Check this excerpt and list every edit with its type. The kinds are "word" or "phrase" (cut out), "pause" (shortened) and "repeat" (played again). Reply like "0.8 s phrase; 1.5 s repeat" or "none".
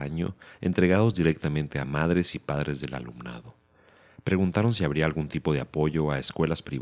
none